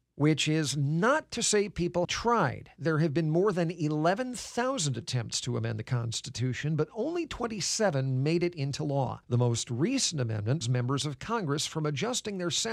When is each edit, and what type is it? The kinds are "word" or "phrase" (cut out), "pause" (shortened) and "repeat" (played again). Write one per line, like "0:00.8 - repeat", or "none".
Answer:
0:02.0 - word
0:09.2 - pause
0:10.6 - word